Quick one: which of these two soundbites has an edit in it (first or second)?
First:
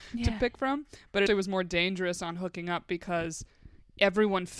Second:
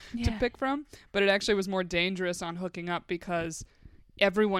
first